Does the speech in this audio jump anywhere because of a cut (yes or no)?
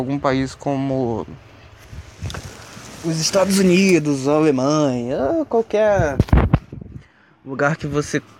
no